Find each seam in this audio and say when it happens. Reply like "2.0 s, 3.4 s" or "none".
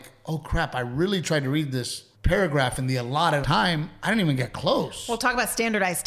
2.1 s, 3.4 s